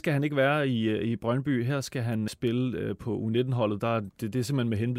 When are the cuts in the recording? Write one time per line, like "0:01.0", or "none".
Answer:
0:02.3